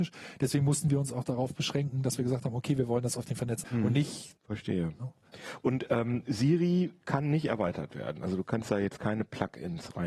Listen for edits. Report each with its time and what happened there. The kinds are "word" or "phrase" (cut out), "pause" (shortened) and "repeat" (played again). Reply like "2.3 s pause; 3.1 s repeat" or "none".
3.6 s word; 4.4 s pause